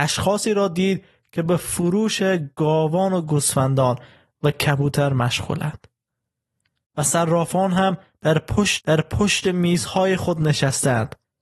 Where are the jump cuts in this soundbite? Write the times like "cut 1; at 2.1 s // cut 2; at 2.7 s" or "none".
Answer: cut 1; at 8.8 s